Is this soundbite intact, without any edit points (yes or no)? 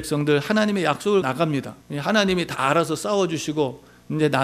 no